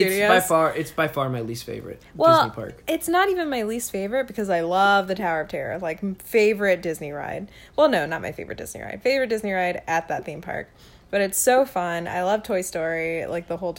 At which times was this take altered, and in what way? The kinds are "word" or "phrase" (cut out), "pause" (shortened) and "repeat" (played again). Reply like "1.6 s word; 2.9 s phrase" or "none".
none